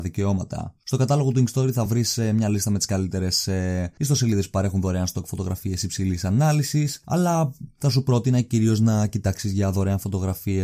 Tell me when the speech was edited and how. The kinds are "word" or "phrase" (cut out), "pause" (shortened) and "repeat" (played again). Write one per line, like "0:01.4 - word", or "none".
none